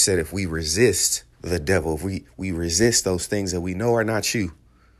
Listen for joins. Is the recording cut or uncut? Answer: cut